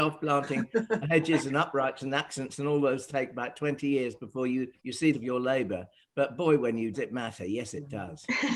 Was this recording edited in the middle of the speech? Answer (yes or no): yes